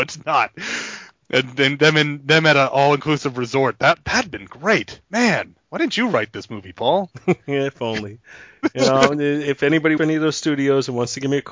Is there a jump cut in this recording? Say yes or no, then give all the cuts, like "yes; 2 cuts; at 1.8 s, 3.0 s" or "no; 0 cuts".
yes; 1 cut; at 10.0 s